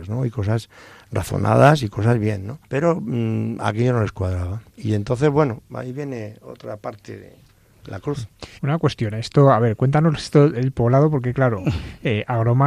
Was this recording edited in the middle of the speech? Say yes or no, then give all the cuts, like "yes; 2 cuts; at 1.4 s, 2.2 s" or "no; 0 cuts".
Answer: yes; 3 cuts; at 2.6 s, 4.7 s, 8.6 s